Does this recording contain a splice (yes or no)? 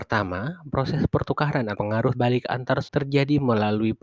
yes